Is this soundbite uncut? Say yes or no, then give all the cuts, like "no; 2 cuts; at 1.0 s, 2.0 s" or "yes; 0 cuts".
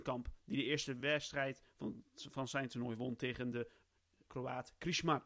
yes; 0 cuts